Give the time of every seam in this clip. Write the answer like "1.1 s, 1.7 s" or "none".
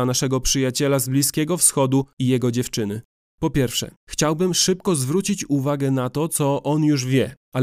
3.1 s

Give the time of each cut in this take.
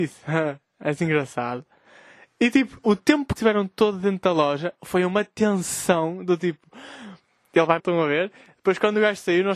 2.8 s, 3.4 s, 7.8 s

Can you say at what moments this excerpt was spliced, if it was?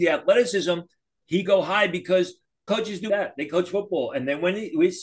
1.5 s, 2.7 s, 3.1 s

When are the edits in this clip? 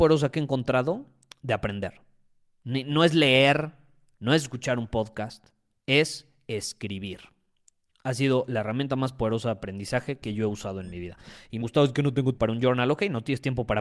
11.6 s, 12.4 s

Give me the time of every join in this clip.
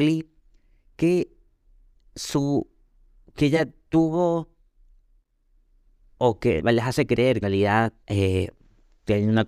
6.6 s, 7.4 s, 8.0 s

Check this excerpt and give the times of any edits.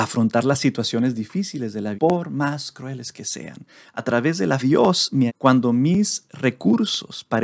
2.0 s, 4.6 s, 5.3 s

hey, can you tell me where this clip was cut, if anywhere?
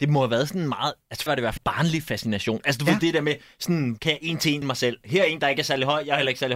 1.3 s, 1.6 s, 4.0 s, 4.6 s

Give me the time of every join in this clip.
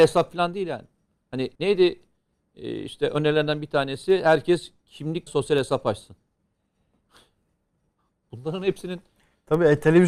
1.5 s, 5.3 s

